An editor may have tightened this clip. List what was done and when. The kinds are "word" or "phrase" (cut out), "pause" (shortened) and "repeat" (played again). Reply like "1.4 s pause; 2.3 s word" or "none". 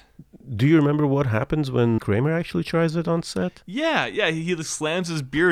2.0 s word